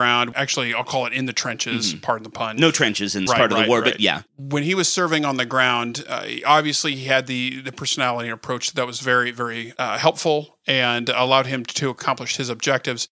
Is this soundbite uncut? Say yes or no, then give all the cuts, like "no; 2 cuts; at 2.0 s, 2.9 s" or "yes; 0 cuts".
no; 1 cut; at 3.3 s